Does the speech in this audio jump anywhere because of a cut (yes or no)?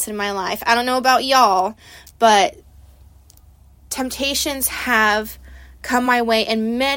no